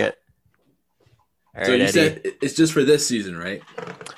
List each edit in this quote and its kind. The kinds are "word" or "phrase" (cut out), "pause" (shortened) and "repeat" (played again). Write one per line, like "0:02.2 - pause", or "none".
none